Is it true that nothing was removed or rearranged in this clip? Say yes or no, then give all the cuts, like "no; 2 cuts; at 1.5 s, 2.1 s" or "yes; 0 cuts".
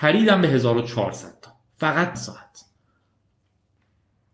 no; 1 cut; at 2.1 s